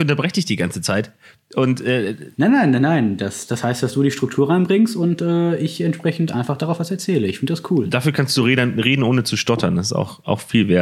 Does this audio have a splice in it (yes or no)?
no